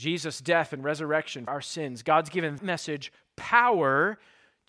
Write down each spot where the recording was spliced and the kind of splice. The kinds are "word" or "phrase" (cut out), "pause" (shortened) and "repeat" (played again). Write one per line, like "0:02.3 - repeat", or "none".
0:01.5 - word
0:02.6 - word

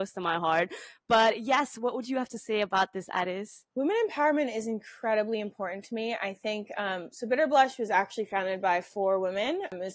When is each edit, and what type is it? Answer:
0:03.7 - pause

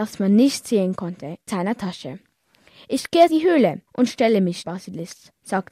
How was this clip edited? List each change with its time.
0:01.5 - word
0:03.3 - word
0:03.9 - pause
0:04.6 - word

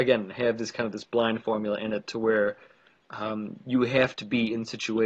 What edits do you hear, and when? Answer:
none

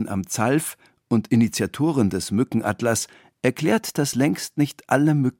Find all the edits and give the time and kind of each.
none

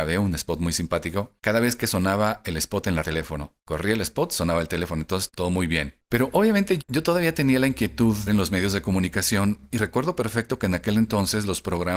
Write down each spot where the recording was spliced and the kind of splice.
0:01.4 - pause
0:03.0 - phrase
0:03.6 - pause
0:05.3 - word
0:06.8 - word
0:08.3 - word

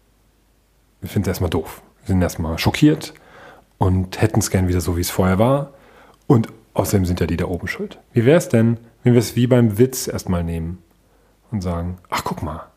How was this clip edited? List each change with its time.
0:01.9 - pause
0:08.1 - pause

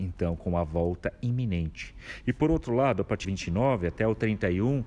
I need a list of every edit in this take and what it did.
0:03.2 - phrase

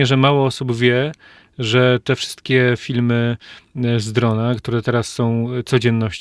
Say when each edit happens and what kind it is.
none

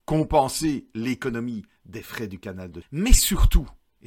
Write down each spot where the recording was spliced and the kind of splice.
0:02.8 - word

